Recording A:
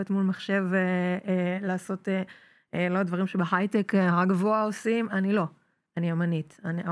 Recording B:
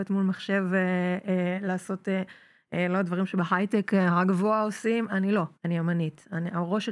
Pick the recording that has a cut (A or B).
B